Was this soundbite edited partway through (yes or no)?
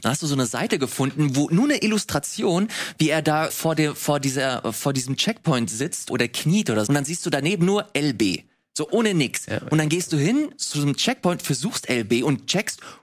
yes